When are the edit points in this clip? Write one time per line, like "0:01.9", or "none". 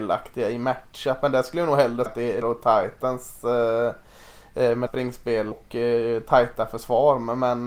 0:02.1
0:02.4
0:04.9
0:05.5